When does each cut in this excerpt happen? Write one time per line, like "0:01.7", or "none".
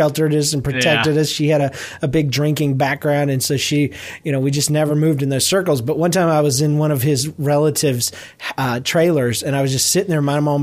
none